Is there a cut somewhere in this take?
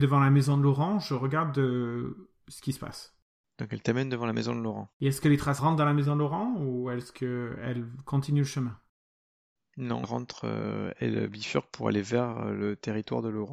yes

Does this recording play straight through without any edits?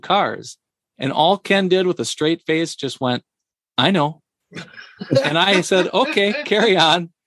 yes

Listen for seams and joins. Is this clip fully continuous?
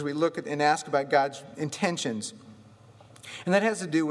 yes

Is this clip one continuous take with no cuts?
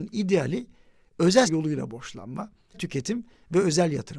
no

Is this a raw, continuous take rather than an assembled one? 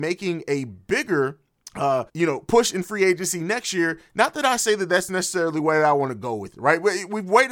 no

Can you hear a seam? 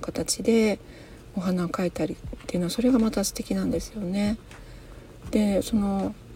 no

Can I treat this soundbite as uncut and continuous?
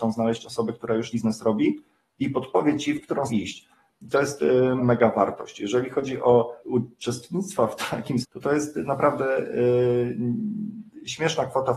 no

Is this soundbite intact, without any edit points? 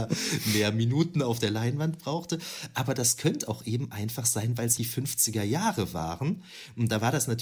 no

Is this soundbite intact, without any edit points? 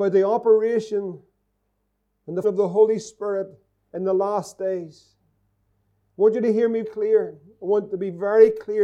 no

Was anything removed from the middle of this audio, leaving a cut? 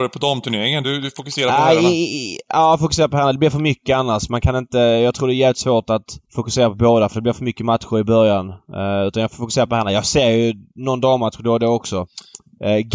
yes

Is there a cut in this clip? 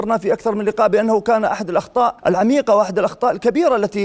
yes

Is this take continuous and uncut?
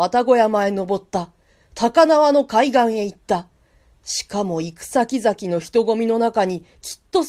yes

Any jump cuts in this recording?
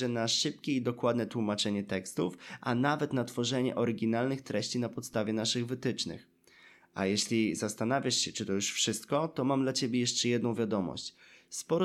no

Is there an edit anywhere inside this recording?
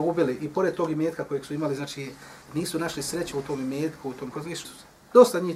yes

